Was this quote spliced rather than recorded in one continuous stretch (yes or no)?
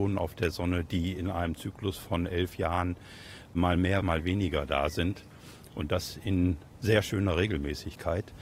no